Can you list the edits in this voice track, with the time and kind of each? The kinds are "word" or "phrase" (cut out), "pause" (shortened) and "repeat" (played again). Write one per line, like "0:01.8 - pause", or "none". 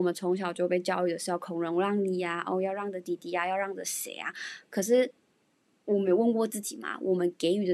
none